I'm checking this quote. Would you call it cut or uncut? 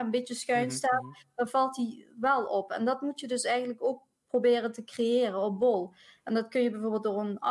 uncut